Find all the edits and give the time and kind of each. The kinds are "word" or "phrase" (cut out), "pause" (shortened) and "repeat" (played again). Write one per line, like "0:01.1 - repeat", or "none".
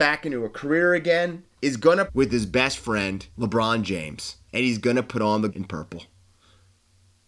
0:01.5 - pause
0:02.1 - word
0:03.3 - pause
0:04.4 - pause
0:05.5 - word